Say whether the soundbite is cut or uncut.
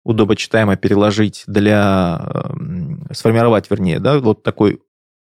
uncut